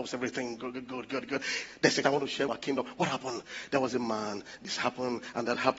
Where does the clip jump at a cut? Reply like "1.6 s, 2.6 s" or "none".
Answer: 2.0 s, 2.5 s